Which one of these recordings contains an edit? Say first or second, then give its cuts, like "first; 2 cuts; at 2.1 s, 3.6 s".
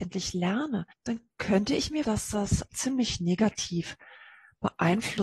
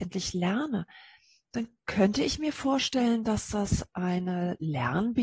first; 3 cuts; at 0.9 s, 2.0 s, 2.7 s